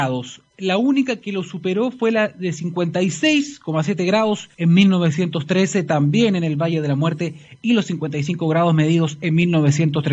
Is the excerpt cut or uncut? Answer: cut